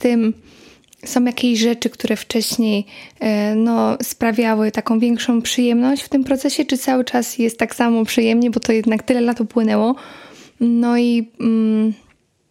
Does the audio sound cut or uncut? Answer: uncut